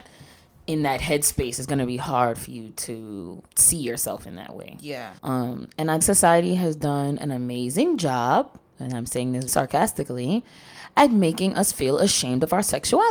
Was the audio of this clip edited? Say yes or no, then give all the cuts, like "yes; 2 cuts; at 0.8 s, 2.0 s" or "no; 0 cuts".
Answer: yes; 4 cuts; at 3.5 s, 5.2 s, 6.0 s, 9.5 s